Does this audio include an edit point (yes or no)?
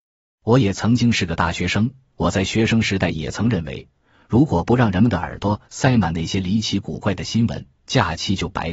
no